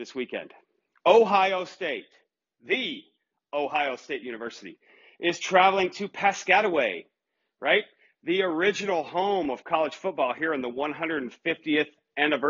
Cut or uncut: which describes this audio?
uncut